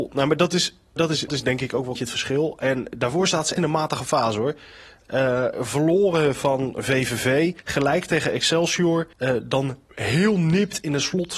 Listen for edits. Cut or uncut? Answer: cut